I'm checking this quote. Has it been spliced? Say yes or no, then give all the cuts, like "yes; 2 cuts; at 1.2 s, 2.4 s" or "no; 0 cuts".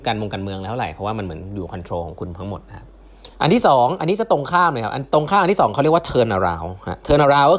yes; 1 cut; at 3.3 s